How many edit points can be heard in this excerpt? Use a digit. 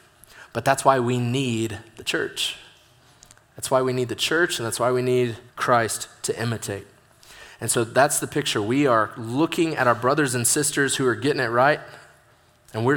1